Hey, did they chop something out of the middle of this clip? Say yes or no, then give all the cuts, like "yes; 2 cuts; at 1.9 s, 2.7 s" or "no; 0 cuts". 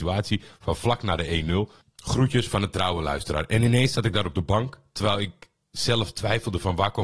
no; 0 cuts